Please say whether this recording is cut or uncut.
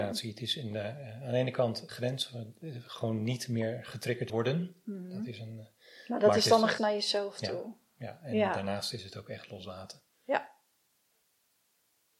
cut